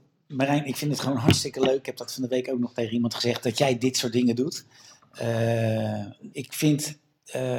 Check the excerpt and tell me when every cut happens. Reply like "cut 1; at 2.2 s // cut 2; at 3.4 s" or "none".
cut 1; at 6.3 s